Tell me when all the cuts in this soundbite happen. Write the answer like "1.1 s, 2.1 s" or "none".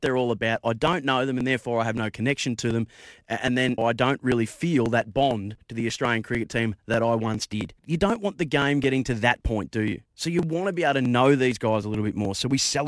3.8 s, 7.8 s, 10.1 s

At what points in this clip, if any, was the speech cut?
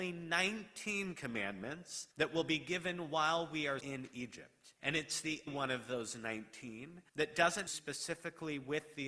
2.1 s, 3.8 s, 4.8 s, 5.5 s, 7.1 s, 7.7 s

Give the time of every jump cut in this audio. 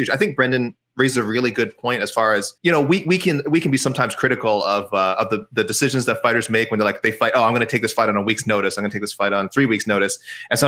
2.6 s

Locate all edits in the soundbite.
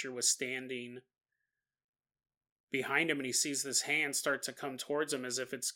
none

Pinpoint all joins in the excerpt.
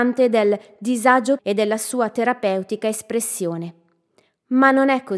1.4 s

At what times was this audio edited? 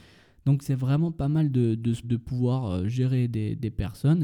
2.0 s

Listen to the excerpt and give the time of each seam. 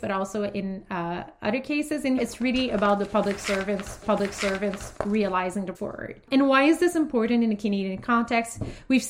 2.2 s, 4.0 s, 5.7 s

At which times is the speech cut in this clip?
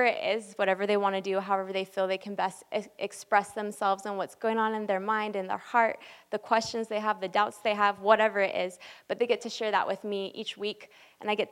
none

